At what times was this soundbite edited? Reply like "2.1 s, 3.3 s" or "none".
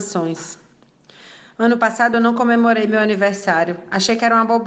none